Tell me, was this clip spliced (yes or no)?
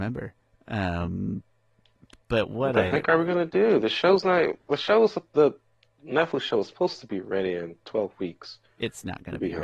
no